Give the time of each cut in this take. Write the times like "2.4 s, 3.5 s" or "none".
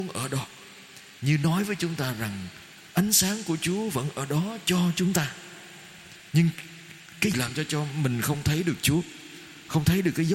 7.3 s